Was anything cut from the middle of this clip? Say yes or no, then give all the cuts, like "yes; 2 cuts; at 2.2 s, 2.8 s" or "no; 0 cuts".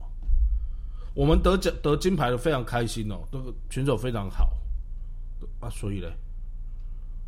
no; 0 cuts